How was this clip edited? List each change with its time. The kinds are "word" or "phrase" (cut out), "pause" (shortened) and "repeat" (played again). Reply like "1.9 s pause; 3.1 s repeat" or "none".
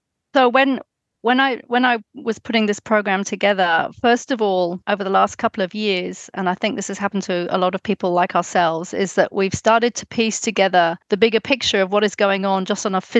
4.8 s pause; 11.0 s pause